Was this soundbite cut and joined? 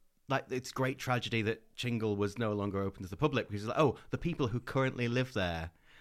no; 0 cuts

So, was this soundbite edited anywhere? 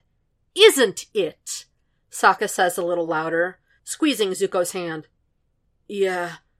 no; 0 cuts

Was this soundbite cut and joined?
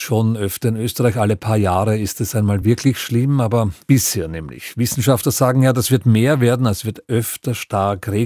no; 0 cuts

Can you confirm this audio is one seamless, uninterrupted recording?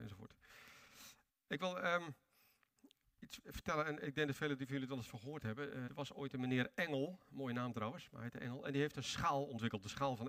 no; 1 cut; at 5.9 s

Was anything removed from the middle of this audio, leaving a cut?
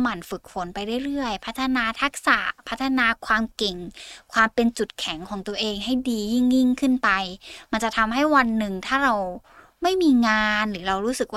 no; 0 cuts

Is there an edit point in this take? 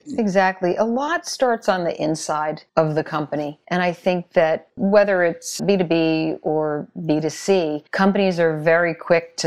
yes; 3 cuts; at 2.7 s, 5.6 s, 7.9 s

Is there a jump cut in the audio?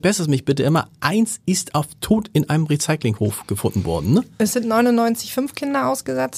no; 0 cuts

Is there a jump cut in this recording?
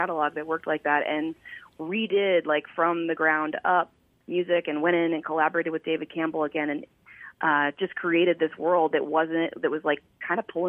no; 0 cuts

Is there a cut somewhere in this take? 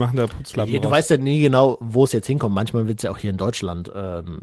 no; 0 cuts

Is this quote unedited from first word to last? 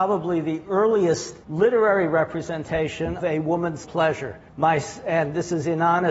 no; 4 cuts; at 1.4 s, 3.2 s, 3.8 s, 4.5 s

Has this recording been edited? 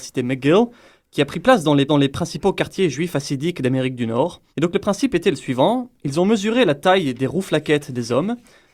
yes; 2 cuts; at 1.9 s, 4.5 s

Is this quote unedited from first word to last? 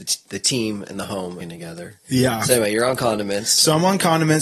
no; 1 cut; at 1.4 s

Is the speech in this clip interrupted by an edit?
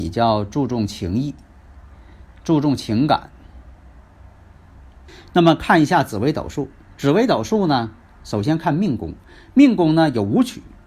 no; 0 cuts

